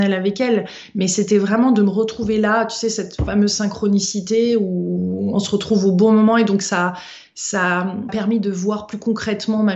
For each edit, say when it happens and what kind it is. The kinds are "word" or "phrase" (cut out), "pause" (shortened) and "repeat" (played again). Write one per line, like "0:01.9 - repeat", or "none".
0:08.1 - word